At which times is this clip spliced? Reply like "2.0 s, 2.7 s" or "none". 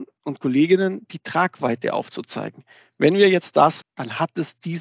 3.8 s